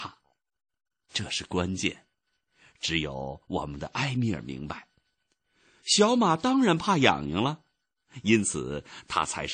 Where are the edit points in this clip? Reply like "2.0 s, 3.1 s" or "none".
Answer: none